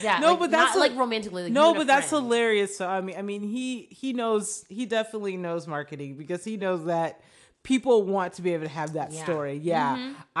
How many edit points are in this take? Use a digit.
0